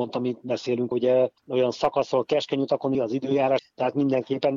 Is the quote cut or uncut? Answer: cut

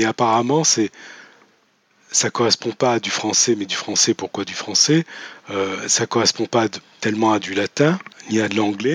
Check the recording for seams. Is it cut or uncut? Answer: uncut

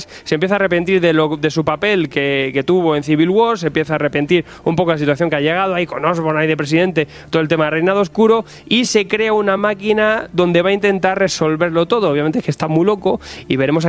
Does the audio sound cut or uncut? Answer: uncut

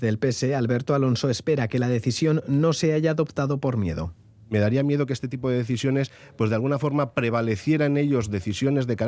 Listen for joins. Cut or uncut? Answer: uncut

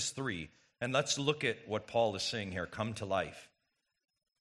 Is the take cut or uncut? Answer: uncut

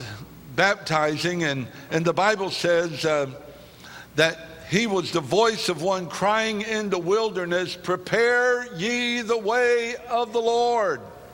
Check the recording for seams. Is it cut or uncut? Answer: uncut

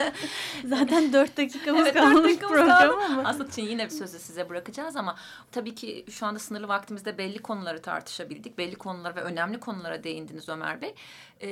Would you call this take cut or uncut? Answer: cut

